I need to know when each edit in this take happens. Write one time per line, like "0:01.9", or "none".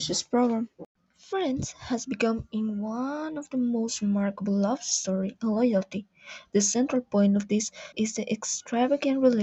0:01.0
0:07.9